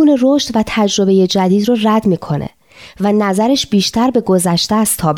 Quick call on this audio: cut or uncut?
uncut